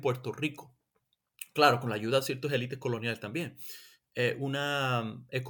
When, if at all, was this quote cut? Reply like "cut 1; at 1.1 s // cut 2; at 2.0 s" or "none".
none